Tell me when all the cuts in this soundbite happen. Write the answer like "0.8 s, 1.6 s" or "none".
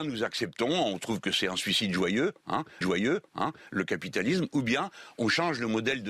2.8 s